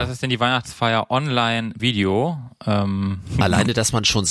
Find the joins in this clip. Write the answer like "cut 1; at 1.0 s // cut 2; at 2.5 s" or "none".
cut 1; at 1.8 s